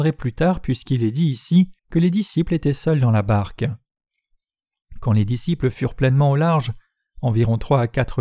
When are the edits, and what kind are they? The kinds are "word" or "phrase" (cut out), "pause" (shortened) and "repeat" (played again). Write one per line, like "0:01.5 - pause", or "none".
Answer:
0:01.8 - pause